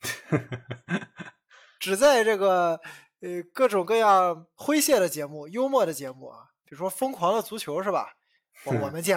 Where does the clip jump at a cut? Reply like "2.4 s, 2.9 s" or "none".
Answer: none